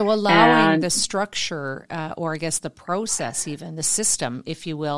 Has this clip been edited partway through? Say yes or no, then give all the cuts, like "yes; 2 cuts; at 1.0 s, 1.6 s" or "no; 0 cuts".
no; 0 cuts